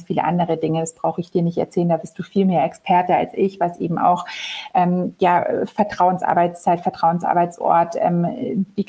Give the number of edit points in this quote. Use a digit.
0